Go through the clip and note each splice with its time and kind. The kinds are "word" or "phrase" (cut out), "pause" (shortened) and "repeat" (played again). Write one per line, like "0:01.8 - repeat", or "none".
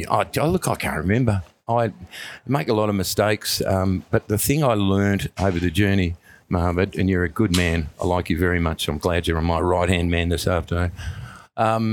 none